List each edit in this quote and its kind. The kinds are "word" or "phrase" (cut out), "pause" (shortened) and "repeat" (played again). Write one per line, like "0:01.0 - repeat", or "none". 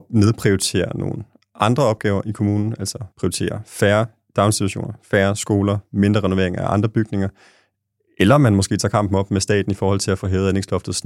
0:03.1 - pause

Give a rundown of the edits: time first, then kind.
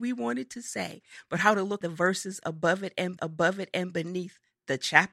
0:01.8 - word
0:03.2 - repeat

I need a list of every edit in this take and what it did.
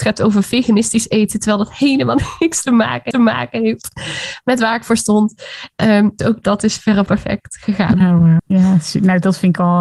0:03.1 - repeat
0:06.2 - word
0:07.1 - word
0:08.4 - word

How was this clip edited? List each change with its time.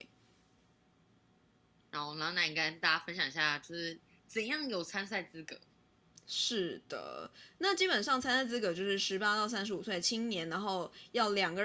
none

